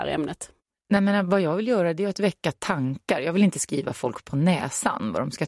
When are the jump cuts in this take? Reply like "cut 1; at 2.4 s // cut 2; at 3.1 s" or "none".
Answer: none